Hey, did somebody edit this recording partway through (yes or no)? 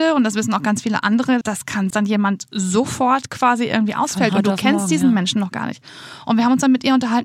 yes